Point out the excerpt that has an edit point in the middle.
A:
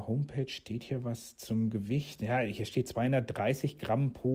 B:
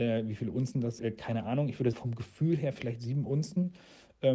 B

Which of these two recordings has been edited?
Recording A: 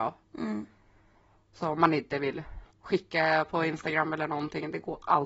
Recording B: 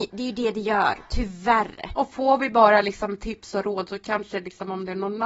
A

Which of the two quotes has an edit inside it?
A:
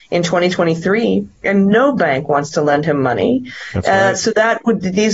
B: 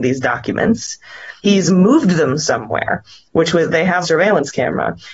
B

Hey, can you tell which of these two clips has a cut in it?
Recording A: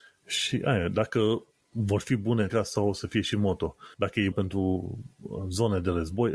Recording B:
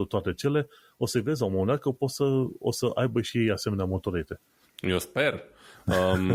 A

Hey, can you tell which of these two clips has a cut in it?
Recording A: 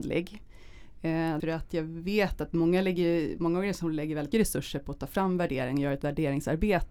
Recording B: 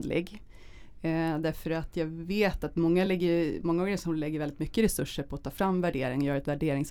A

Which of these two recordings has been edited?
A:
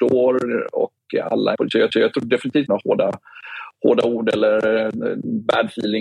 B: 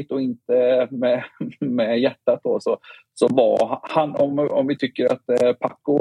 A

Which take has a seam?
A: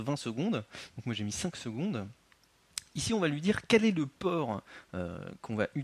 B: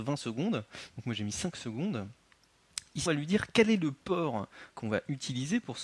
B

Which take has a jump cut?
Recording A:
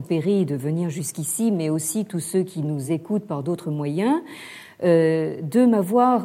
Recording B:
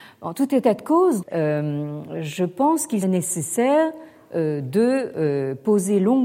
B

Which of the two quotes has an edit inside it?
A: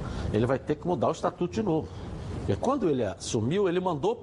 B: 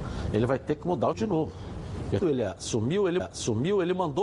B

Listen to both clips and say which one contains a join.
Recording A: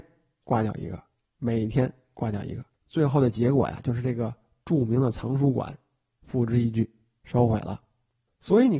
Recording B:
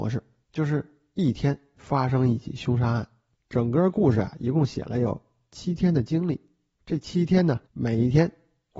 B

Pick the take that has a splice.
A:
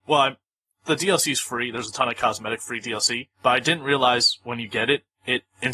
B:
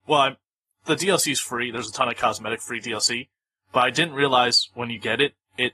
A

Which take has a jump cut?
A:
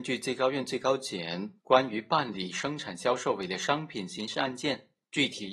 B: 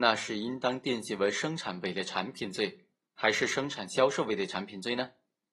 A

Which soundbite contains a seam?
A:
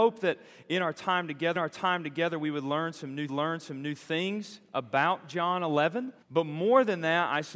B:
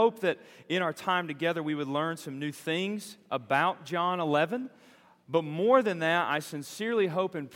A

